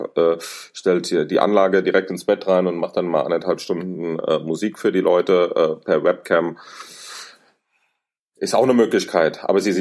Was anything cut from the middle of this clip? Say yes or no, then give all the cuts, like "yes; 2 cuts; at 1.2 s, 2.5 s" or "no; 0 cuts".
no; 0 cuts